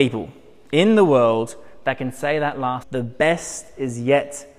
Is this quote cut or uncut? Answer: cut